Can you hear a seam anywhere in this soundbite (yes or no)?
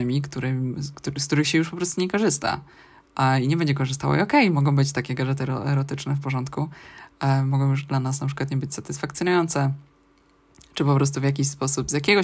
no